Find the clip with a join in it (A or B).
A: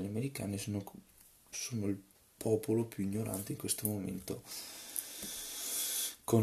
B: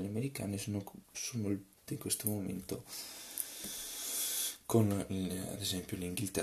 B